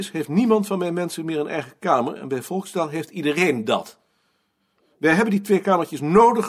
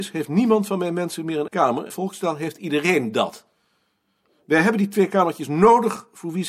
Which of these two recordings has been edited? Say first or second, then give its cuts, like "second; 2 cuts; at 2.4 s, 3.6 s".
second; 2 cuts; at 1.5 s, 1.9 s